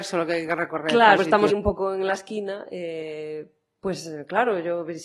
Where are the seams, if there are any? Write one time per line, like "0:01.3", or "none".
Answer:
0:01.2
0:01.5